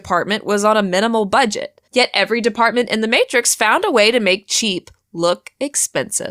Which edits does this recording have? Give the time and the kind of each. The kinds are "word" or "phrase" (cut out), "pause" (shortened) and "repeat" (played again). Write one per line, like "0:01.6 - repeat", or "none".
0:01.9 - pause